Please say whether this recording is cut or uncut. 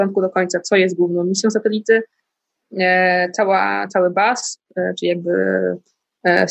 uncut